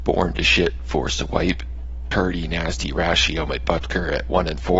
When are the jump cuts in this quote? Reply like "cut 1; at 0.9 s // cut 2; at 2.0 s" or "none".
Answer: none